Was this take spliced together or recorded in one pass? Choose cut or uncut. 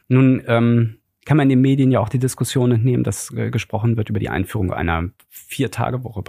uncut